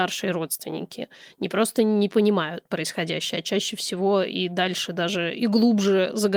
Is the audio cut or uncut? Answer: uncut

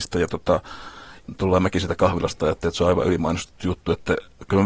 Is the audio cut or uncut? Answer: uncut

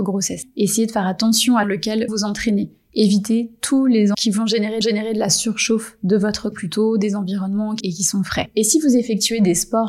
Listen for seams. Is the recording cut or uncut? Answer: cut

